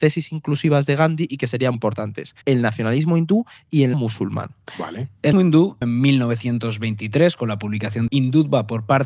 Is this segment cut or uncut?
cut